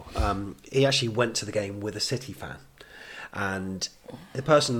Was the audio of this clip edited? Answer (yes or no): no